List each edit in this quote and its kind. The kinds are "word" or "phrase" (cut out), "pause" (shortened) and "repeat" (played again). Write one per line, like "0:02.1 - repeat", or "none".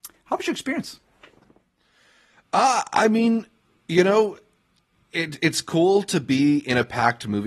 none